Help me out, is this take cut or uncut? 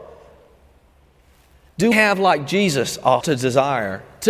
cut